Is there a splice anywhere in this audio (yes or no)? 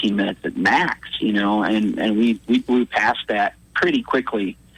no